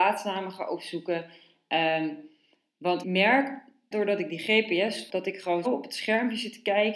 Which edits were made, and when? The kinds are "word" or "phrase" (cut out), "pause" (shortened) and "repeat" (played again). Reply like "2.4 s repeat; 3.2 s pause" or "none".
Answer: 3.0 s word; 3.9 s word; 5.1 s word; 5.6 s word